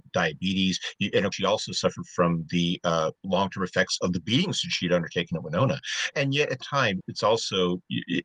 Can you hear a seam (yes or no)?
yes